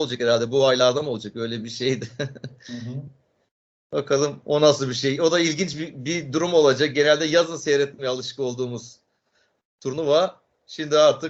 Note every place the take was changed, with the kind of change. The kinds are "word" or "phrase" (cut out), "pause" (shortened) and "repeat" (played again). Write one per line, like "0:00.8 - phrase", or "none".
none